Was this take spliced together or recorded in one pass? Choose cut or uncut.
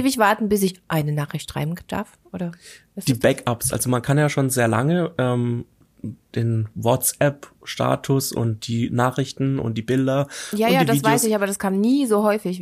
uncut